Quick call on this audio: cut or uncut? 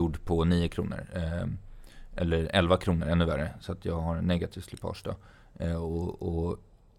uncut